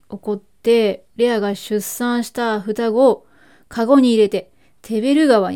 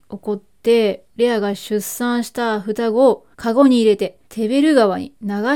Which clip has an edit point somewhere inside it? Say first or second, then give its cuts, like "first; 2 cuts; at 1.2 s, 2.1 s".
second; 2 cuts; at 3.3 s, 4.3 s